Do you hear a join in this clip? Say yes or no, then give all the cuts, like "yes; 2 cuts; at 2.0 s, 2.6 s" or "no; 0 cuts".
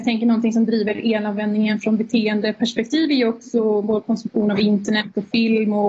no; 0 cuts